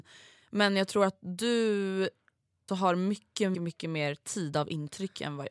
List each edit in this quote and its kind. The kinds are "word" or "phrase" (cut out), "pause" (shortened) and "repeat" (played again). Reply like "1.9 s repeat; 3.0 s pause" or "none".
2.7 s word; 3.5 s word